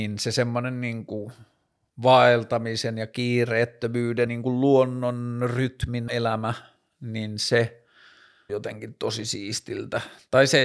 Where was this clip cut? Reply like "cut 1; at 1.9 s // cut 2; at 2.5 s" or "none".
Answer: cut 1; at 4.3 s // cut 2; at 6.1 s // cut 3; at 8.5 s